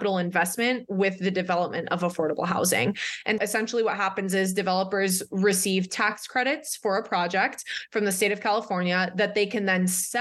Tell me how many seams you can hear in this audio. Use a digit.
1